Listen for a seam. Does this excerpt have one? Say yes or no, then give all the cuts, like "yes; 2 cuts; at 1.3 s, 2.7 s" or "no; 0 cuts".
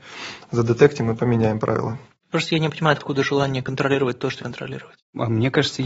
yes; 2 cuts; at 3.0 s, 4.4 s